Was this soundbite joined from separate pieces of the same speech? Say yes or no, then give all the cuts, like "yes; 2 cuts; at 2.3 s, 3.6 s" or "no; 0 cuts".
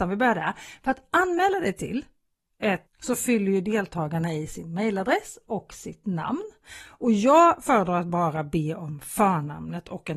yes; 1 cut; at 2.9 s